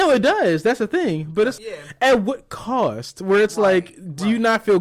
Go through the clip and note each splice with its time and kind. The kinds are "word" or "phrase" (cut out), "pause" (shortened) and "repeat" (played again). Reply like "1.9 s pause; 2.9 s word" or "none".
1.6 s word

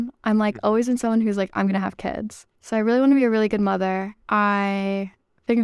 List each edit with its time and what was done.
2.5 s pause; 4.2 s pause

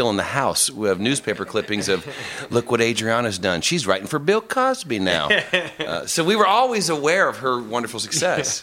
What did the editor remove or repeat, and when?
none

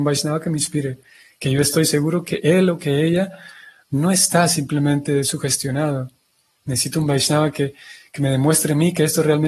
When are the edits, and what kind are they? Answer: none

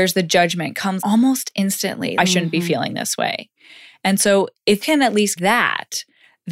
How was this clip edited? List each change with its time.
1.0 s word; 2.2 s word; 4.8 s word; 5.4 s word

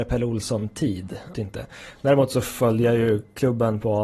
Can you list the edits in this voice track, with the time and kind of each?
1.3 s word

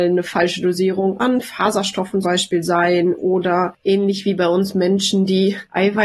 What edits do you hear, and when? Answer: 2.2 s word

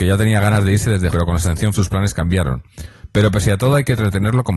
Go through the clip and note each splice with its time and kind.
1.1 s word; 1.7 s word

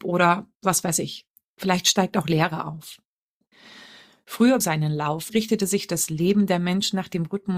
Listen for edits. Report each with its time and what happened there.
4.6 s phrase; 5.3 s word

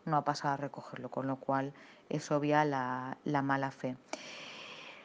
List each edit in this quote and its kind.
none

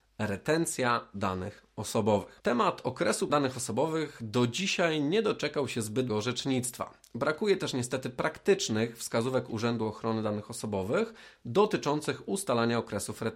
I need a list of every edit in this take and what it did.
3.3 s word; 6.1 s word

